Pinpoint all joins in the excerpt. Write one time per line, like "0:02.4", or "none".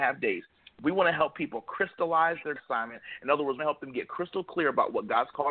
0:02.6
0:03.6